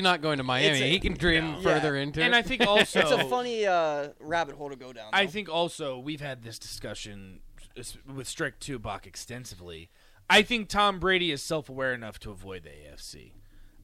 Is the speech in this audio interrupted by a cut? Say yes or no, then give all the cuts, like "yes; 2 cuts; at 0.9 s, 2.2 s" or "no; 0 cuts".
no; 0 cuts